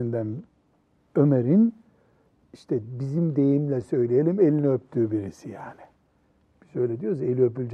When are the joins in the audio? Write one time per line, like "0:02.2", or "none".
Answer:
none